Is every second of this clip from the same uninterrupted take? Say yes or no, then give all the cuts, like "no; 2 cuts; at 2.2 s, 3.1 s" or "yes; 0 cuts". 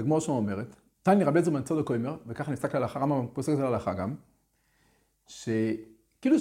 yes; 0 cuts